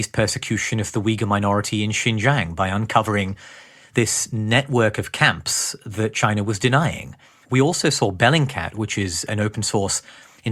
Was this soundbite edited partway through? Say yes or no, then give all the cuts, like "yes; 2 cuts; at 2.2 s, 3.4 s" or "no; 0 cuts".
yes; 1 cut; at 7.2 s